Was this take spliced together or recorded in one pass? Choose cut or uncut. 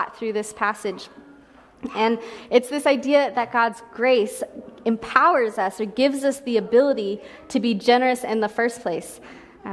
uncut